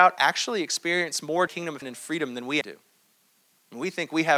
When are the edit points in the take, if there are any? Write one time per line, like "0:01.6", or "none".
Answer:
0:01.5
0:01.8
0:02.6